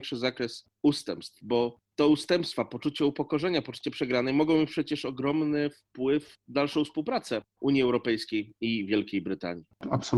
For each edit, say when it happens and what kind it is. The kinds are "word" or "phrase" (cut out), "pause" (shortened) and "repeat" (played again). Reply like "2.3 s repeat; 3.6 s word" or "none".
6.3 s word